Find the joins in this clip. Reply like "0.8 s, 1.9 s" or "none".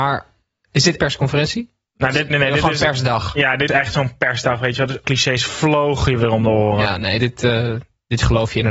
1.0 s, 2.3 s, 3.7 s, 5.0 s, 7.2 s